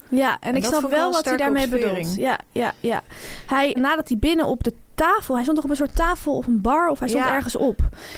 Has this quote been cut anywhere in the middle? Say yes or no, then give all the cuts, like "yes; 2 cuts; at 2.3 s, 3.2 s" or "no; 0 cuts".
yes; 1 cut; at 3.7 s